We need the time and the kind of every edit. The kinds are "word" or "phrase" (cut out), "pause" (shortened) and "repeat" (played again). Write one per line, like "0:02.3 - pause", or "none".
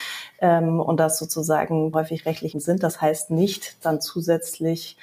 0:01.9 - word
0:02.5 - word
0:03.8 - word